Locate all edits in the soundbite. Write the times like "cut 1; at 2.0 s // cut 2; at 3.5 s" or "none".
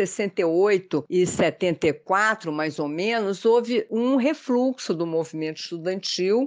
none